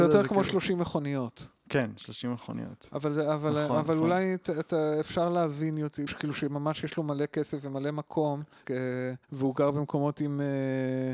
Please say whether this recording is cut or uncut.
cut